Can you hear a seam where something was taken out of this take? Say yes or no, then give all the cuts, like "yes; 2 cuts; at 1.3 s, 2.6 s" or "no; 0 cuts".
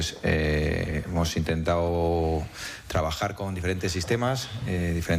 no; 0 cuts